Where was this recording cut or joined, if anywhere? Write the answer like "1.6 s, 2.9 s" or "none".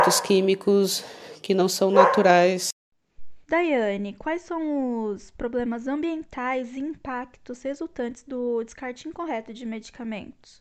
3.4 s